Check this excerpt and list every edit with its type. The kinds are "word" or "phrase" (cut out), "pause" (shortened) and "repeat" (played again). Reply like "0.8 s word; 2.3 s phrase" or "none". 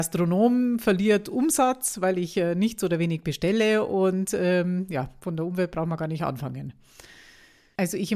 none

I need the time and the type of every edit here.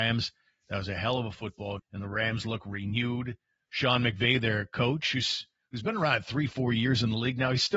1.8 s word

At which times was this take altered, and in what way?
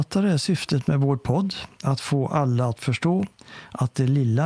none

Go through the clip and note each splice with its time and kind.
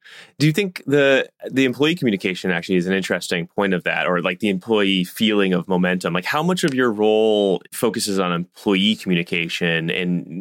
7.7 s pause

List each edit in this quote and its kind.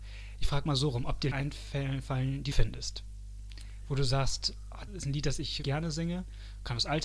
1.3 s word; 2.5 s phrase; 4.9 s word; 5.6 s word

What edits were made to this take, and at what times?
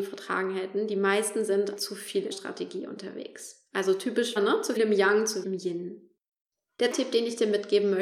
1.8 s word; 2.3 s word; 4.4 s word; 4.8 s word; 5.4 s word; 6.9 s word

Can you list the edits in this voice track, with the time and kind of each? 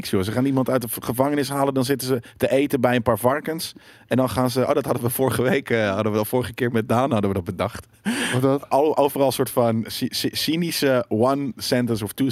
none

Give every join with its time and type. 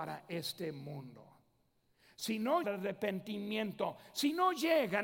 2.6 s phrase

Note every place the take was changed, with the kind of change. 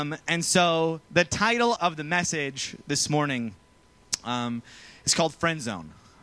1.1 s pause; 1.8 s word

